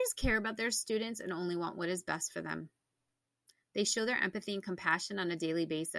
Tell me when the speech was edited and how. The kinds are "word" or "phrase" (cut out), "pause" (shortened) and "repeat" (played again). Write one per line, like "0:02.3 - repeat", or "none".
none